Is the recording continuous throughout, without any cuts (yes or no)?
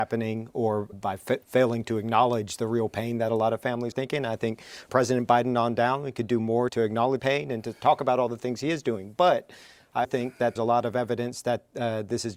no